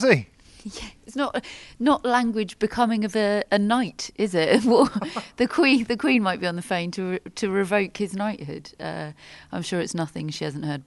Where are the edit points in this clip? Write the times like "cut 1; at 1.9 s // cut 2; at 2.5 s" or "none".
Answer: none